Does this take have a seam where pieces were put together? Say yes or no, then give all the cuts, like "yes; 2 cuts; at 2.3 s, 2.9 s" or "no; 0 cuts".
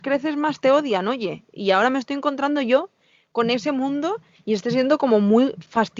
no; 0 cuts